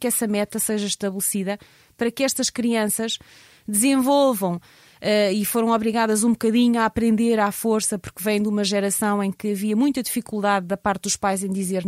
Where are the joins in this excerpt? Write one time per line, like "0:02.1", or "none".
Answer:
none